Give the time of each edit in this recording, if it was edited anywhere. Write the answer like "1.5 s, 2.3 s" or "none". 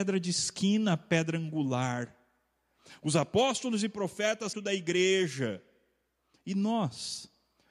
4.5 s

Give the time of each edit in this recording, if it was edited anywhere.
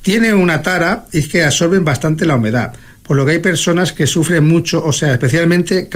none

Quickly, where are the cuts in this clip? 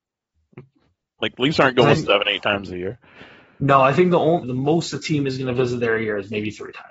2.0 s, 4.4 s

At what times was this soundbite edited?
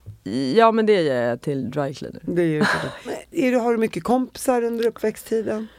3.3 s

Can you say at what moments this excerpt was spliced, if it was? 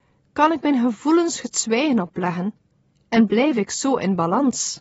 none

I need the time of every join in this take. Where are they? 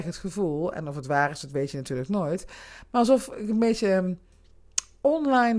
none

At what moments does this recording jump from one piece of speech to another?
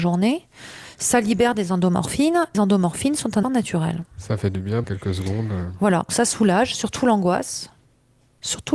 2.5 s, 3.4 s, 4.8 s, 6.1 s

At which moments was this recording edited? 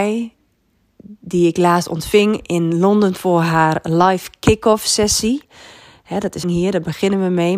6.4 s

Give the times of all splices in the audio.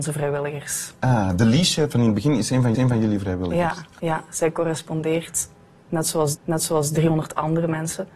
2.7 s, 4.0 s, 6.3 s

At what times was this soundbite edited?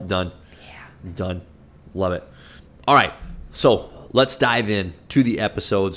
none

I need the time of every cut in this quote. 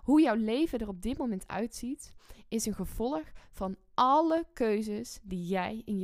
none

